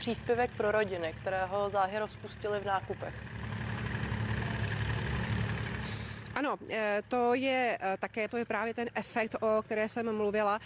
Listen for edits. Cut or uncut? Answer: cut